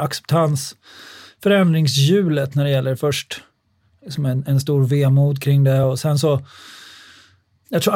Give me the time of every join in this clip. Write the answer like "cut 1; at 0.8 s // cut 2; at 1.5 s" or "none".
none